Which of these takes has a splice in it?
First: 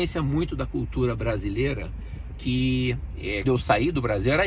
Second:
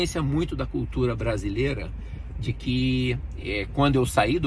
first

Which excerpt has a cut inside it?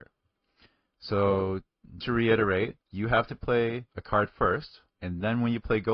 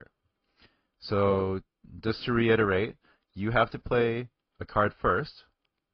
first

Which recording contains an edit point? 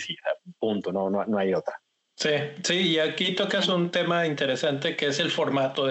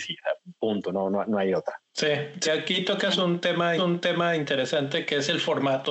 second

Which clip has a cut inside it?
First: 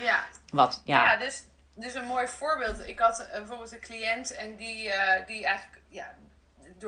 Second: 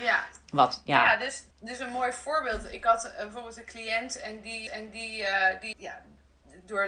second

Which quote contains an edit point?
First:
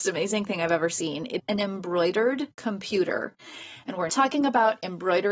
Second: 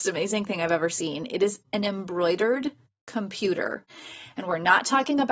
first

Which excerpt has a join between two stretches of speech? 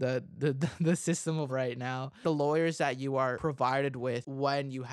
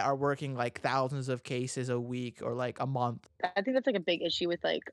first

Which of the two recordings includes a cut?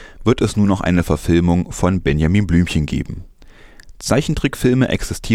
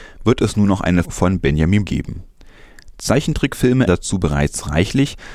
second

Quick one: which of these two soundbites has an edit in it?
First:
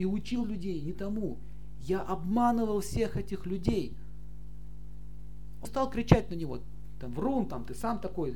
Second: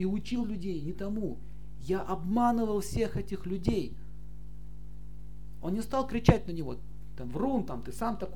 first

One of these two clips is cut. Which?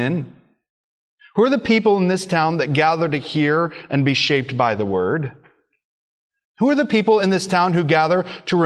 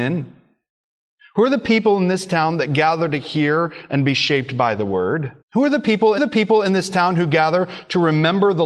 second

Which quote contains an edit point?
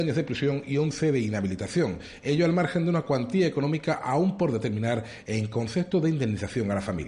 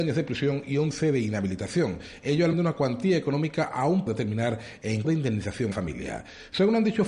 second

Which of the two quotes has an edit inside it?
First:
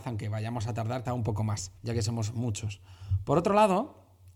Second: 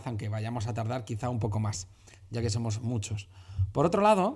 first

